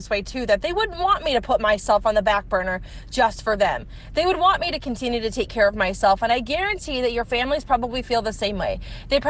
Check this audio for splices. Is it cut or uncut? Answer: uncut